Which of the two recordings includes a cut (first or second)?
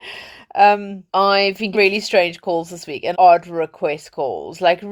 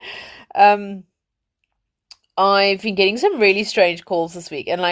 first